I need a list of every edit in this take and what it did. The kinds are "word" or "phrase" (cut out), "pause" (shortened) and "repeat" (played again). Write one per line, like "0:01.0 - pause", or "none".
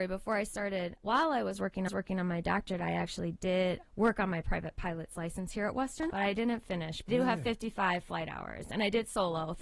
0:01.0 - word
0:01.9 - repeat
0:03.8 - word
0:06.1 - word
0:07.1 - word